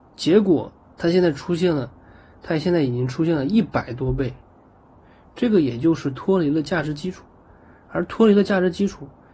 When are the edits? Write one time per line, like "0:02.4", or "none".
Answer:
none